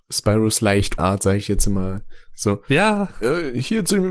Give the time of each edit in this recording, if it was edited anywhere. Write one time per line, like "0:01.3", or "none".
0:01.0